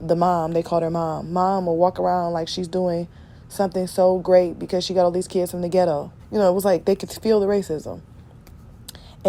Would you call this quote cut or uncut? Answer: cut